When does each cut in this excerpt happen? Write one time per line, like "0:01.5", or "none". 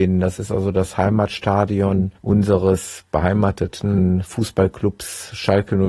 0:02.1

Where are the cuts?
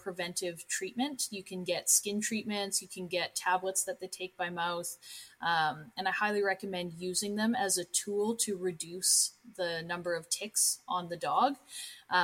none

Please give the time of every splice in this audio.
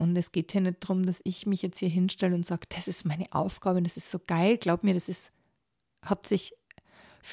none

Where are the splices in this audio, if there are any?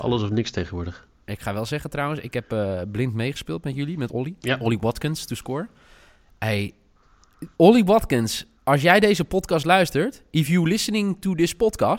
0:04.1
0:04.4
0:07.5
0:08.5

